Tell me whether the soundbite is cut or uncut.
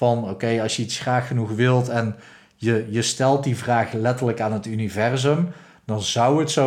uncut